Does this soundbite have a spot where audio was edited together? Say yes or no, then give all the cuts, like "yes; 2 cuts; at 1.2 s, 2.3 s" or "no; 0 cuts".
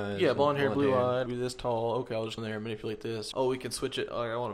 yes; 3 cuts; at 1.3 s, 2.4 s, 3.3 s